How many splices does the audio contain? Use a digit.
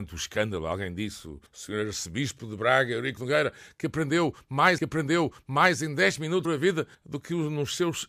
5